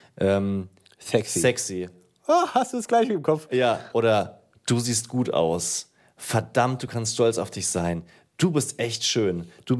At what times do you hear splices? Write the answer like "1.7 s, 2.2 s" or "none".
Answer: none